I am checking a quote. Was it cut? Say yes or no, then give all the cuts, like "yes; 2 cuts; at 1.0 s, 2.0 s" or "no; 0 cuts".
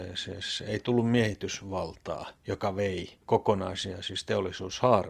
yes; 1 cut; at 2.4 s